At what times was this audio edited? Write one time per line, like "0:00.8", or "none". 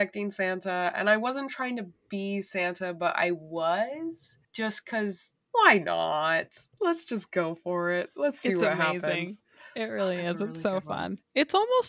0:04.4
0:05.4
0:06.7